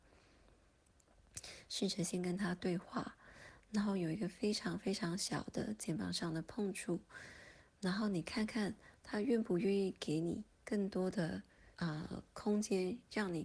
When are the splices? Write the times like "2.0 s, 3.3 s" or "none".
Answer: 10.5 s, 11.7 s

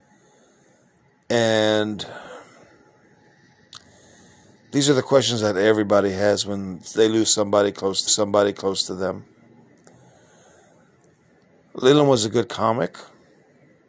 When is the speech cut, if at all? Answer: 8.1 s

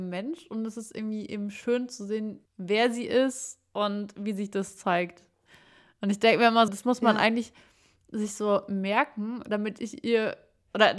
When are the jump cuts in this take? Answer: 2.5 s, 6.7 s

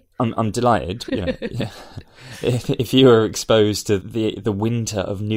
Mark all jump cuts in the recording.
1.1 s, 4.0 s

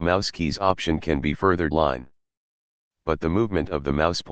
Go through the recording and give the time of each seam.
1.4 s, 1.7 s

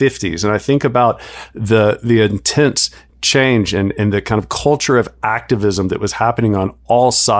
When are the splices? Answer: none

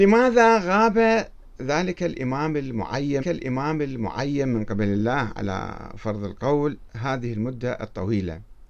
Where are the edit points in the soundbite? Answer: 3.2 s

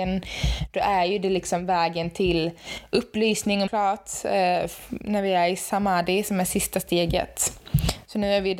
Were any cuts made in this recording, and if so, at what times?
3.7 s

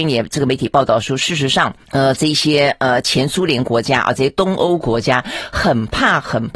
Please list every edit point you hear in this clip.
1.8 s

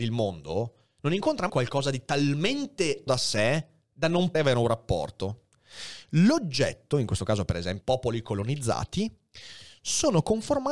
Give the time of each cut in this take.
1.5 s, 3.1 s, 4.3 s, 7.8 s

